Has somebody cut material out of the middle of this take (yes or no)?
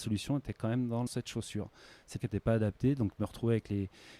yes